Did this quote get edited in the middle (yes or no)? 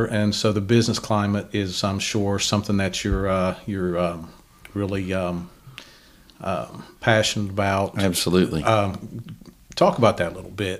no